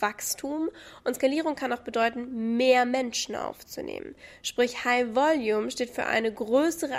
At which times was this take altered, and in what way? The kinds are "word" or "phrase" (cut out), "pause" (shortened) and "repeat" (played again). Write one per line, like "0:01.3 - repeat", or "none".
none